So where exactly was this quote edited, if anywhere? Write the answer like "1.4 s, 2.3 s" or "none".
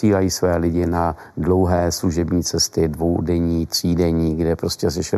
none